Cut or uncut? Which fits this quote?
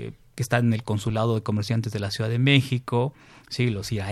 uncut